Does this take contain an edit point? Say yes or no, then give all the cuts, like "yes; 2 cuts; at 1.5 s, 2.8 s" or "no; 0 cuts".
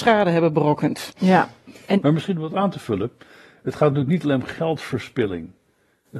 no; 0 cuts